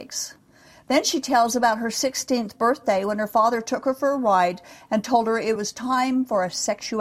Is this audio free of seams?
yes; 0 cuts

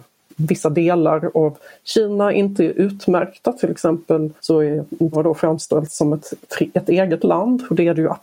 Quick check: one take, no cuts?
no; 2 cuts; at 4.4 s, 5.1 s

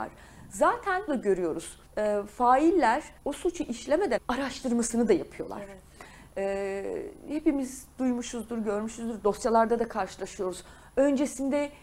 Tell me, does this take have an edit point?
yes; 4 cuts; at 1.1 s, 1.9 s, 3.2 s, 4.2 s

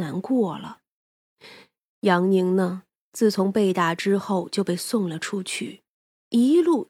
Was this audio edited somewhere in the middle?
no; 0 cuts

